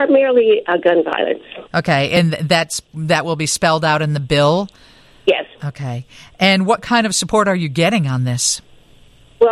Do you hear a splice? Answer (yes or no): yes